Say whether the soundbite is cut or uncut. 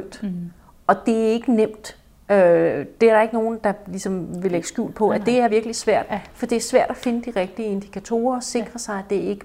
cut